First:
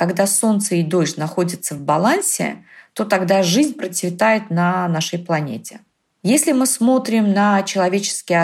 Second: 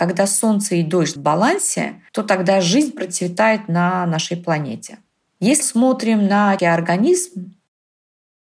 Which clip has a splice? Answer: second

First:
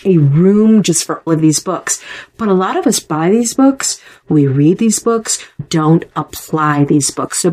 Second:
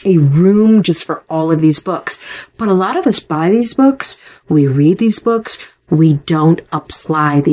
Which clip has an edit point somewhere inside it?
first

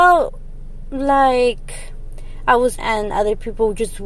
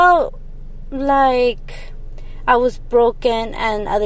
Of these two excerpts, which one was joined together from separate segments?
first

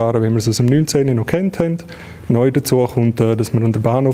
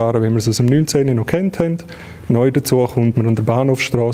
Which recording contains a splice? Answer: second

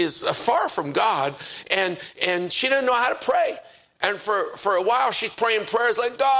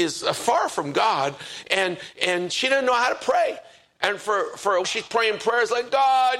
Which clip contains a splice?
second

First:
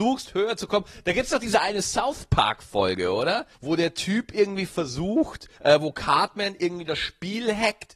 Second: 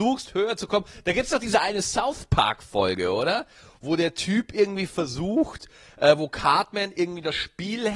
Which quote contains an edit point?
first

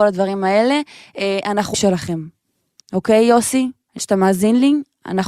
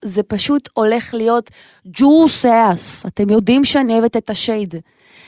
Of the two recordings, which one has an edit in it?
first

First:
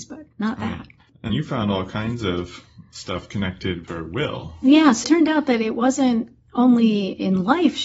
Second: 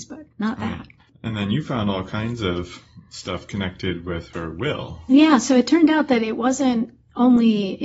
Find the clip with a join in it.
first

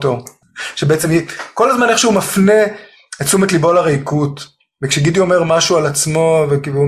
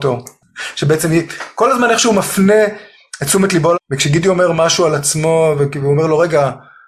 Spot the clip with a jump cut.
second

